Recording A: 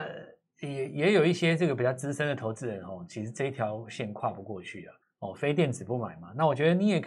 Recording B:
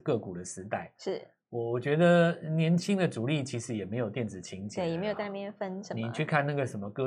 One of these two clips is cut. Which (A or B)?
A